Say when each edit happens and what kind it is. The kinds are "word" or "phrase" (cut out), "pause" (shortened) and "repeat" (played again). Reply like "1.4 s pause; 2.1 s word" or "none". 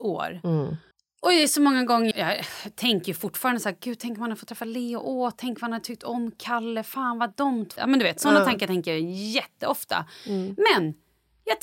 0.9 s pause; 2.1 s word; 7.8 s word